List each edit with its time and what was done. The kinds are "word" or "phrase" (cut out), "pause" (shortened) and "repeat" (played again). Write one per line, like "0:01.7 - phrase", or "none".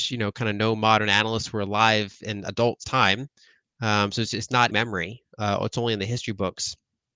0:02.8 - phrase
0:04.7 - phrase

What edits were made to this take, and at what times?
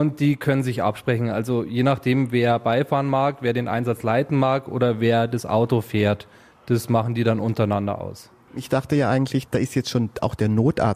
none

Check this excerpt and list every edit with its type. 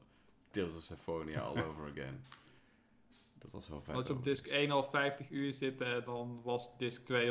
none

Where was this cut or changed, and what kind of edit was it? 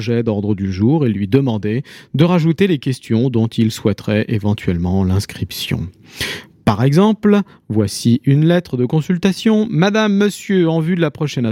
none

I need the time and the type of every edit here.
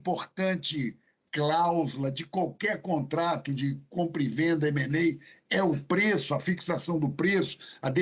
none

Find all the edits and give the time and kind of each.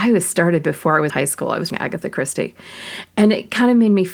0:01.1 - word
0:01.7 - word

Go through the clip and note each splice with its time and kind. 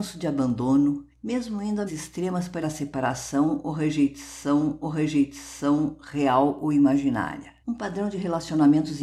0:01.1 - pause
0:01.9 - word
0:02.6 - word
0:04.8 - repeat
0:07.6 - pause

